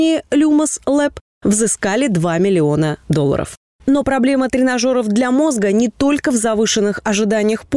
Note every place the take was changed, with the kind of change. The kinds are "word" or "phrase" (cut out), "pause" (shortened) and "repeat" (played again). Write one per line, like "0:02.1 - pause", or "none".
none